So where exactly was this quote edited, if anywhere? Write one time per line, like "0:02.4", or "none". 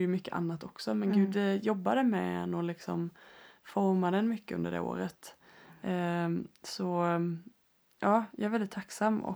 none